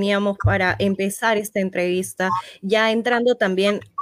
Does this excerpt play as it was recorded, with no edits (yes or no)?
yes